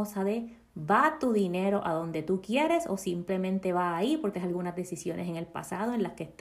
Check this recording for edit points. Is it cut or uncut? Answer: cut